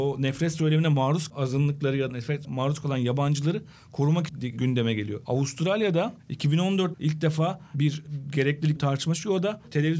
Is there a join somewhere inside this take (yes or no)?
yes